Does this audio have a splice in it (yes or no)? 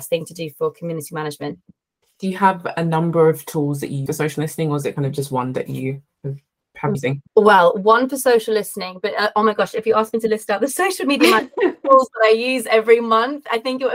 yes